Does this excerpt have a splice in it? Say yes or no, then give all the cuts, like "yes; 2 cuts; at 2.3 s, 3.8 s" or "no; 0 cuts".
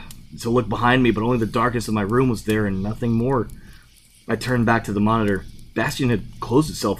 no; 0 cuts